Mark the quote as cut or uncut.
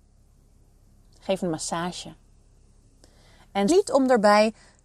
cut